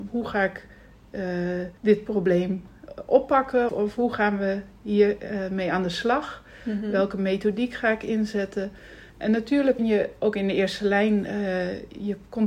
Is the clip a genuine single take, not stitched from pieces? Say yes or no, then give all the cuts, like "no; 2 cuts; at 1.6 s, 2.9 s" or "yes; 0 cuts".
no; 4 cuts; at 1.8 s, 3.7 s, 9.1 s, 9.8 s